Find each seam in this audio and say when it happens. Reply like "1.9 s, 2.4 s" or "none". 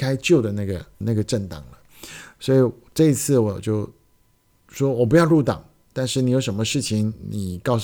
1.0 s